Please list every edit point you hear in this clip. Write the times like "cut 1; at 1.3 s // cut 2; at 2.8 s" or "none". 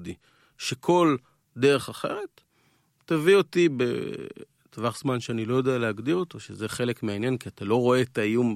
none